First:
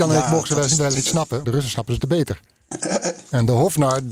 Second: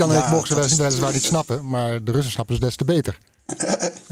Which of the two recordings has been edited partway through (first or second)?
first